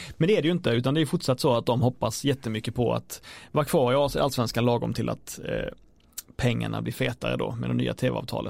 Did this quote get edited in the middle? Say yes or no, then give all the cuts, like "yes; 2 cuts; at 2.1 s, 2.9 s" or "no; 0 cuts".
no; 0 cuts